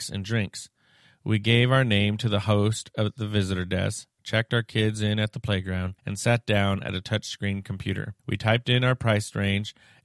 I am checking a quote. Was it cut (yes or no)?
yes